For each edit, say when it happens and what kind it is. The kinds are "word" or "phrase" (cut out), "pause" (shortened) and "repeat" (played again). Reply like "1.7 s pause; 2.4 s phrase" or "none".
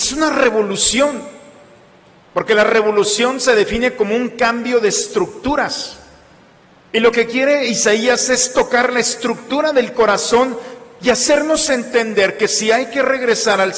none